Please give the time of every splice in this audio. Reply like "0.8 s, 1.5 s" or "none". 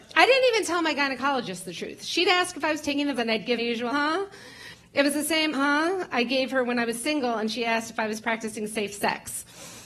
3.2 s, 3.6 s, 3.9 s, 5.5 s